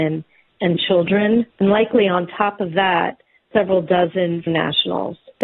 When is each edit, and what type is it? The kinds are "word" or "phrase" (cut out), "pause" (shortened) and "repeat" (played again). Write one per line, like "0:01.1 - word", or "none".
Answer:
0:01.5 - pause
0:03.5 - word
0:04.5 - word